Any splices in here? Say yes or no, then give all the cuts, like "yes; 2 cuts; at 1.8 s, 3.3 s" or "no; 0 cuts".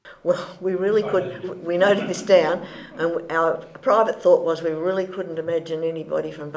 yes; 1 cut; at 1.4 s